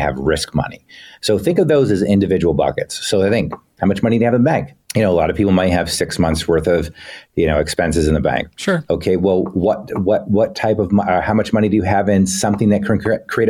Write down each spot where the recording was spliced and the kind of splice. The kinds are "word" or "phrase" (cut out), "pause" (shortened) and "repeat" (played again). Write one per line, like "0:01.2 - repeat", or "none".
none